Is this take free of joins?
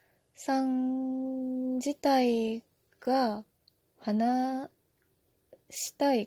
yes; 0 cuts

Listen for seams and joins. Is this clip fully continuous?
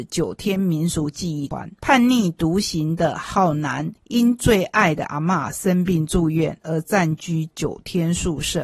no; 1 cut; at 4.0 s

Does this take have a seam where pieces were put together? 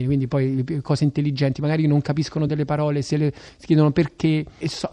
no; 0 cuts

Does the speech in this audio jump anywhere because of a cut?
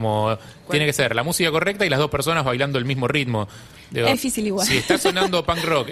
yes; 1 cut; at 4.1 s

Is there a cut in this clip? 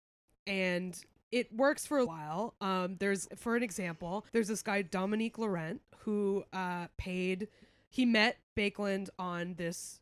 yes; 4 cuts; at 2.1 s, 3.3 s, 4.3 s, 8.4 s

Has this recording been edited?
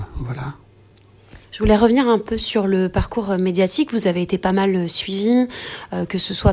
yes; 1 cut; at 1.4 s

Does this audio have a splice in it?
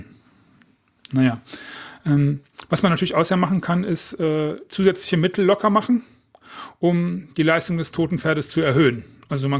no; 0 cuts

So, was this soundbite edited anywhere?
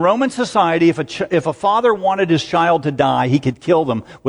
no; 0 cuts

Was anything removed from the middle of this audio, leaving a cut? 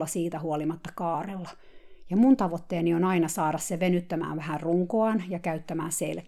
no; 0 cuts

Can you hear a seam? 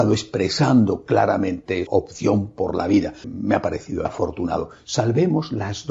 yes; 3 cuts; at 1.9 s, 3.2 s, 4.0 s

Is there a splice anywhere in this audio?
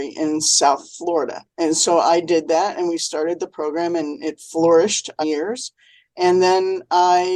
yes; 2 cuts; at 1.5 s, 5.2 s

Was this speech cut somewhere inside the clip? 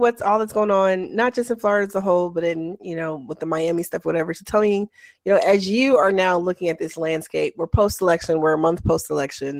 no; 0 cuts

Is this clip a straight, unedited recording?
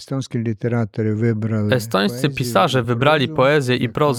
yes; 0 cuts

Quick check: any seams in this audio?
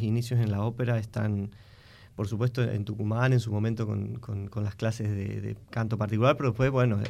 no; 0 cuts

